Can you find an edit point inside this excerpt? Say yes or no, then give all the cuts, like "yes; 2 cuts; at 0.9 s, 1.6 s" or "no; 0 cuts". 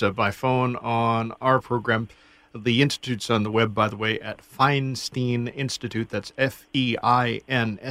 no; 0 cuts